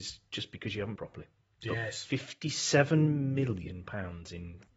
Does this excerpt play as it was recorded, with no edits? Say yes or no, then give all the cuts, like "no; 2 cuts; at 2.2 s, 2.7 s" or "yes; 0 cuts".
no; 1 cut; at 1.0 s